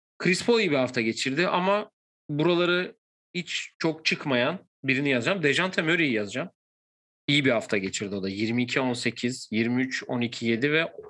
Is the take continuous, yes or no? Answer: yes